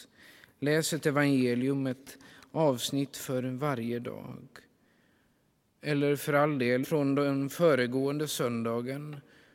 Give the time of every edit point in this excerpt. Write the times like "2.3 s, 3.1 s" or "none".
6.8 s